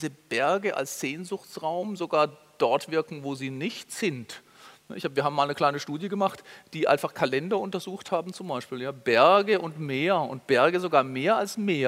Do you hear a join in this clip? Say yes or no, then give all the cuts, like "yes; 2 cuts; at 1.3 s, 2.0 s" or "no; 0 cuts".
no; 0 cuts